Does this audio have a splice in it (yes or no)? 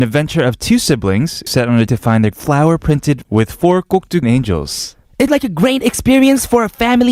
yes